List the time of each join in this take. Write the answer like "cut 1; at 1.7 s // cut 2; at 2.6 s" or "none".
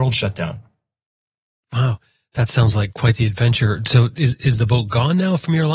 none